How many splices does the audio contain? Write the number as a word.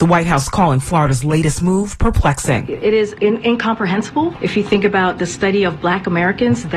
one